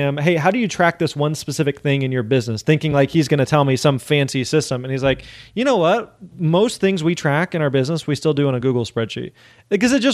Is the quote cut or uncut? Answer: uncut